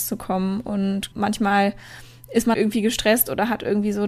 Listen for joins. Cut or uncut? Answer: cut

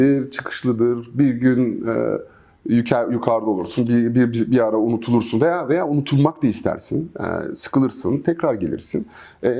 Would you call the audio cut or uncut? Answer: uncut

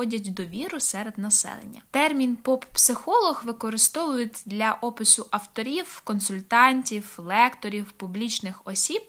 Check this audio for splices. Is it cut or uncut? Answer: cut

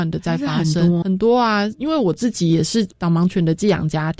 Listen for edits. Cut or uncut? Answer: cut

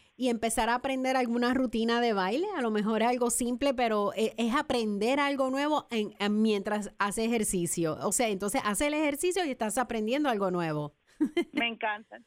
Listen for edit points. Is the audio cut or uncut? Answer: uncut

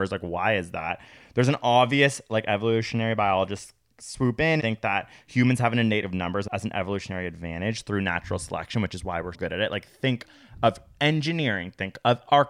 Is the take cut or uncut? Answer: cut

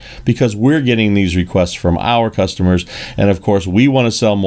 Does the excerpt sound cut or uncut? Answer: uncut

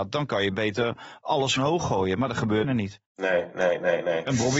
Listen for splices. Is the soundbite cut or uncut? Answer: cut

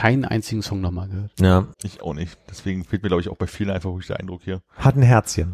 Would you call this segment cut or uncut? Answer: cut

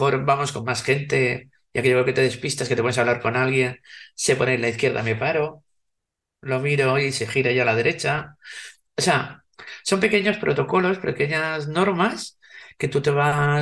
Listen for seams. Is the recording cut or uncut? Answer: uncut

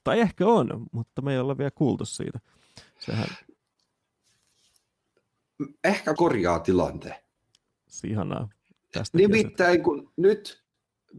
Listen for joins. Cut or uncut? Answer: cut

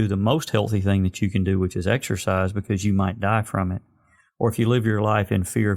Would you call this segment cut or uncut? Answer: uncut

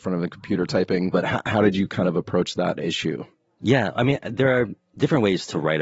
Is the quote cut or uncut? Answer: uncut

